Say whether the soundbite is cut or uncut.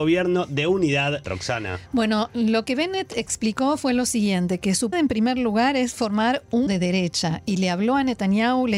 cut